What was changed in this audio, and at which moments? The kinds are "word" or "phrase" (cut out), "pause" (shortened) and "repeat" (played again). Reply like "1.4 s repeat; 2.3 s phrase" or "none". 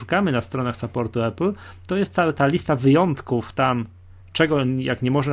none